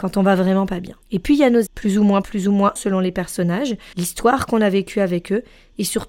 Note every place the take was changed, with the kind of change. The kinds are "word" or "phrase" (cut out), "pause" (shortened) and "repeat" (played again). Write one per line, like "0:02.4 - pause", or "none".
0:01.0 - pause
0:01.7 - word
0:02.2 - word
0:02.8 - word
0:03.9 - pause